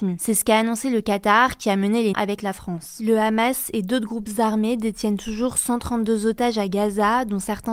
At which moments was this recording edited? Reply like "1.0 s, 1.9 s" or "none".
2.1 s